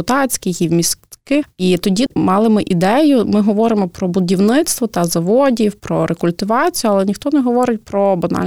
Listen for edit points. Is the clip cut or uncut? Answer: uncut